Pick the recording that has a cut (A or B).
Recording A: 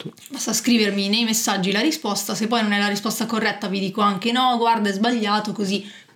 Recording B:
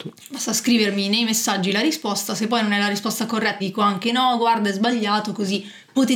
B